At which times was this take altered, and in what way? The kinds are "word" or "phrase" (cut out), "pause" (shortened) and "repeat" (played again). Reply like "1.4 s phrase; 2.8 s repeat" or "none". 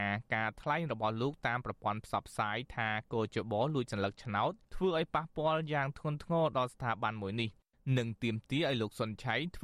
4.6 s pause